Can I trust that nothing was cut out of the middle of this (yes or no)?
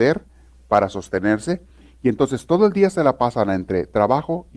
yes